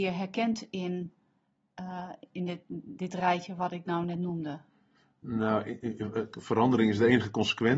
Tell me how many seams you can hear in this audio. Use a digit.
0